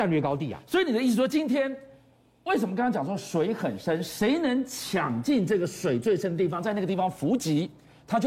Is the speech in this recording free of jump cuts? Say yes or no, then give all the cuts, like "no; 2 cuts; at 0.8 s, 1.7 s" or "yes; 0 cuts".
yes; 0 cuts